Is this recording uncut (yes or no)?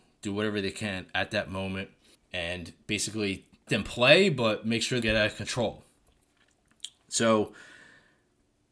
no